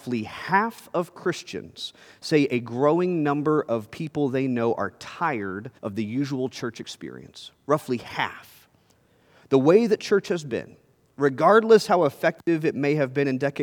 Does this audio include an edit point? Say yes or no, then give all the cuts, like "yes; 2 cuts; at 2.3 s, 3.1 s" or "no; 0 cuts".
yes; 1 cut; at 5.8 s